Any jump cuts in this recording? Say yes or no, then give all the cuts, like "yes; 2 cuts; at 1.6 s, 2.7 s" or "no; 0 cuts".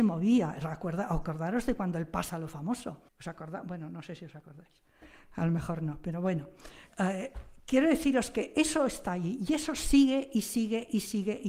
yes; 2 cuts; at 3.1 s, 6.9 s